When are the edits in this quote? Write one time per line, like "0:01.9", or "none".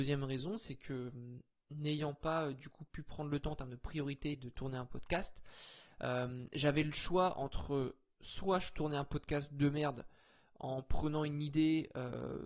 none